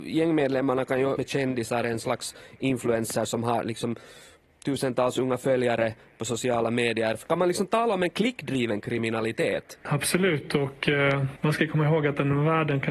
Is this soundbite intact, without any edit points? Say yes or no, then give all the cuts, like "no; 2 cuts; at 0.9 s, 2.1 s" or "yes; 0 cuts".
no; 2 cuts; at 1.2 s, 1.8 s